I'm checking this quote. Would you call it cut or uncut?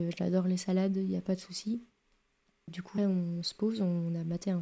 cut